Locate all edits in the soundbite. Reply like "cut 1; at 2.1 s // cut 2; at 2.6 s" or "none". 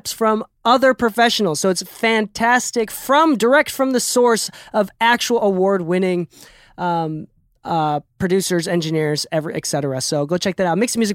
none